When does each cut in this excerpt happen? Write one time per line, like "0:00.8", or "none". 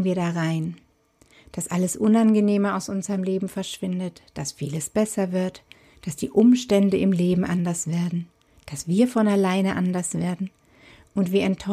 none